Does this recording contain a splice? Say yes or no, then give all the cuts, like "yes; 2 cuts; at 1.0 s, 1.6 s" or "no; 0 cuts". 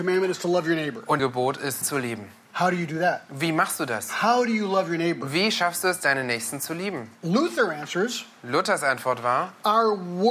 yes; 2 cuts; at 1.2 s, 1.8 s